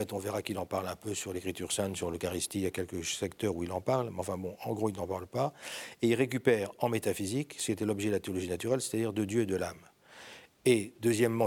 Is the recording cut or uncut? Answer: uncut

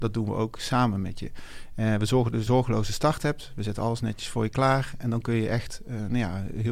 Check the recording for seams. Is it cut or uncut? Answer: cut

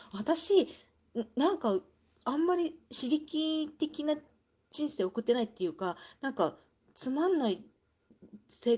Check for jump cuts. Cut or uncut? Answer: uncut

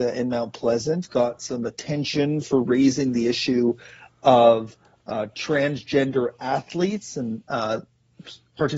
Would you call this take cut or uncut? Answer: uncut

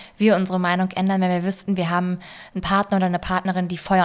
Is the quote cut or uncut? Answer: uncut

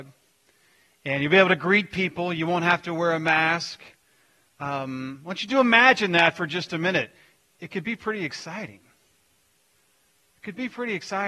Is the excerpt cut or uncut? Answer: uncut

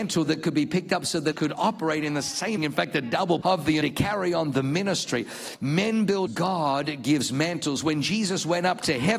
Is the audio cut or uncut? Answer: cut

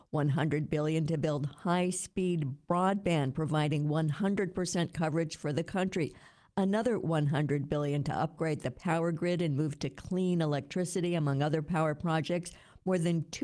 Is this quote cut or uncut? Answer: uncut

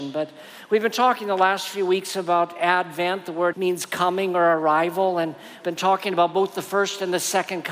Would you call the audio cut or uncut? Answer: cut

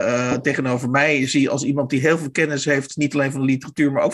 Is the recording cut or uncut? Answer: uncut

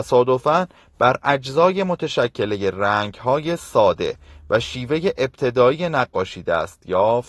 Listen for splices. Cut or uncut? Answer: uncut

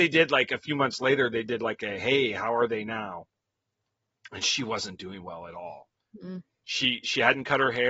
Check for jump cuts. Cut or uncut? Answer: uncut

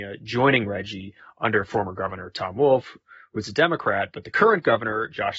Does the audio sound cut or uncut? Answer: uncut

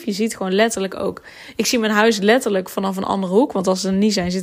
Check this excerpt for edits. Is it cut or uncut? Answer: uncut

